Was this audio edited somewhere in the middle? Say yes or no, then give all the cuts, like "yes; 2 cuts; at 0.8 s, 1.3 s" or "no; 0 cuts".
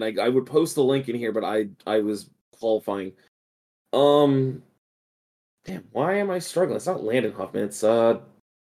no; 0 cuts